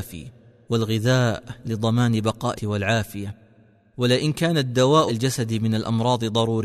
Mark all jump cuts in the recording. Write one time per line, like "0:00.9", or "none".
0:02.6
0:05.1

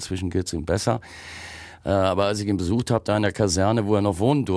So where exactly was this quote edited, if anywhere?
none

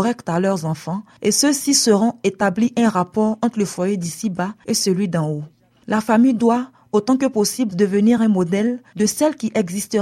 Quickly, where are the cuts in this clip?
none

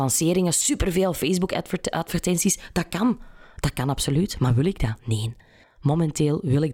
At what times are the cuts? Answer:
0:05.6

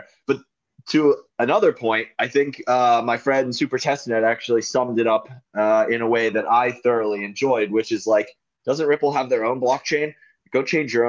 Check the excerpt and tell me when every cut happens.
0:01.3

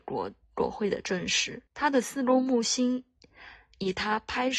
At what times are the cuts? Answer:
0:01.7

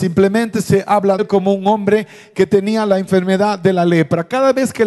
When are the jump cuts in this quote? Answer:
0:01.2

